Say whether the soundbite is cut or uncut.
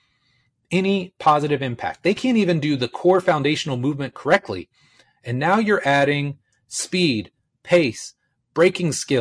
uncut